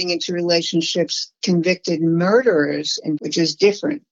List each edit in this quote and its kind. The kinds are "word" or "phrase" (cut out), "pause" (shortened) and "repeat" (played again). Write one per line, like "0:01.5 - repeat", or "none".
0:01.4 - word
0:03.2 - word